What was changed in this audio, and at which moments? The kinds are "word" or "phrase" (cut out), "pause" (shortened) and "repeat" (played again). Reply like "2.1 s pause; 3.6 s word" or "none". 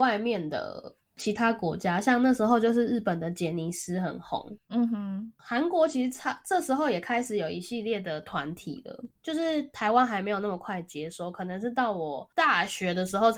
none